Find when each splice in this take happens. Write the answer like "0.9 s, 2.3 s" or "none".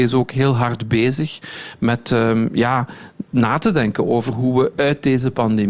3.3 s